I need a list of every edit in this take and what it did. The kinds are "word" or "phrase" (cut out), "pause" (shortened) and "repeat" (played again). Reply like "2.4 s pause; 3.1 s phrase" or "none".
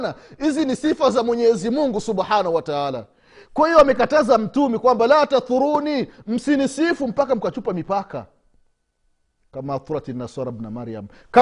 none